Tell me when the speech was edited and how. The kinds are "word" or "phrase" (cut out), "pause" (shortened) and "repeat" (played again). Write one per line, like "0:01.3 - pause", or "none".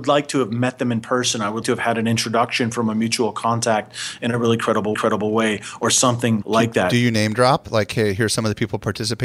0:01.6 - word
0:04.9 - repeat
0:06.4 - word